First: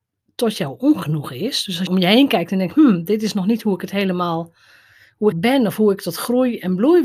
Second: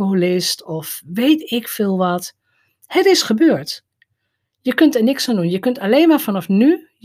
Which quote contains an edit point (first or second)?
first